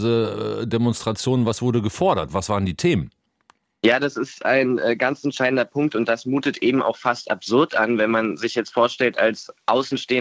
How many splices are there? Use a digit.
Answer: 0